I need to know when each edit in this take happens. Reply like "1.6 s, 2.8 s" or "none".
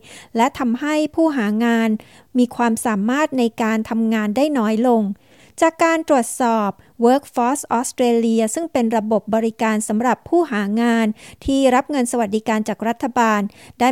none